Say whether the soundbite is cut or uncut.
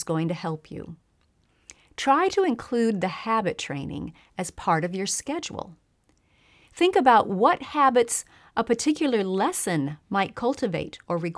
uncut